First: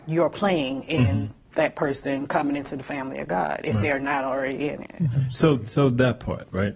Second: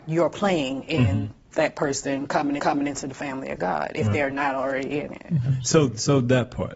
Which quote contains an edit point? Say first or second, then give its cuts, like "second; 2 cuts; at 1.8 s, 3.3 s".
second; 1 cut; at 2.6 s